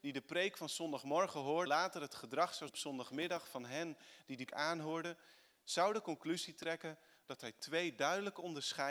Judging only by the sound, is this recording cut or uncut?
cut